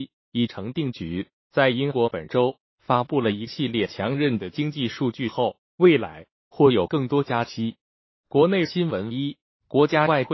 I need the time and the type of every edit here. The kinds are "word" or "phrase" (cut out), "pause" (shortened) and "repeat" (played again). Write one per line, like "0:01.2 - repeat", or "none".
none